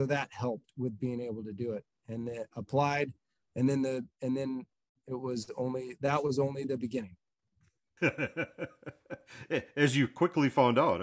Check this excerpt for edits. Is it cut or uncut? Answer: uncut